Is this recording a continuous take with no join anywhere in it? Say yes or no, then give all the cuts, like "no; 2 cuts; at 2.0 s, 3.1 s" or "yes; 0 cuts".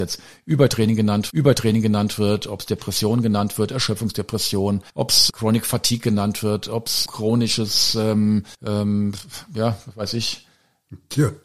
no; 5 cuts; at 1.3 s, 4.9 s, 5.3 s, 7.1 s, 8.5 s